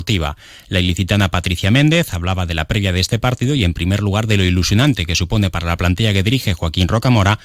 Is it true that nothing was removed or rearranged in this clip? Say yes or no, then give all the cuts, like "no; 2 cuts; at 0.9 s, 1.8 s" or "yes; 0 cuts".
yes; 0 cuts